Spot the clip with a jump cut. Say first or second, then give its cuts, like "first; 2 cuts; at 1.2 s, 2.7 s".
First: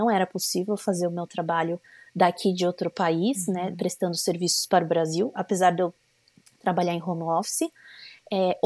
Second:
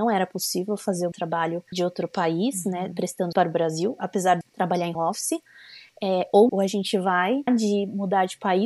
second; 7 cuts; at 1.1 s, 1.7 s, 3.3 s, 4.4 s, 4.9 s, 6.5 s, 7.5 s